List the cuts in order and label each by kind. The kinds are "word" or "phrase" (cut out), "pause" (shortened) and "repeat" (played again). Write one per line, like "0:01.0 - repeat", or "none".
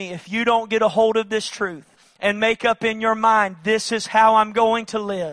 0:02.0 - pause